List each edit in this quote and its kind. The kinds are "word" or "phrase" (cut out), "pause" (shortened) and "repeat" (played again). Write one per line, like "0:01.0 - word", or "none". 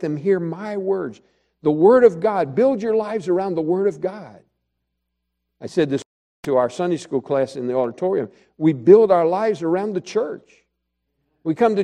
none